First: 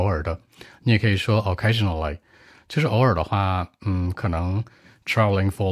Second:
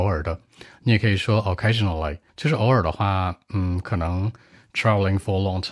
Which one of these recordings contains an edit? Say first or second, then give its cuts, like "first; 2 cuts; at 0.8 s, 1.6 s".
second; 1 cut; at 2.3 s